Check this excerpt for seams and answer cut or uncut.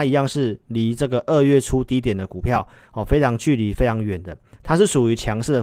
uncut